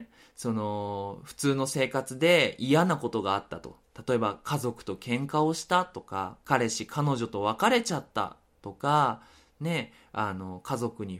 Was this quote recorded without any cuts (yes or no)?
no